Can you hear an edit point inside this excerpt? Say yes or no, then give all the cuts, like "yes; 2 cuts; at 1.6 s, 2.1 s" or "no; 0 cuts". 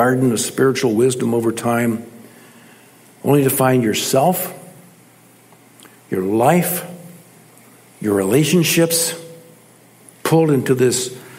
no; 0 cuts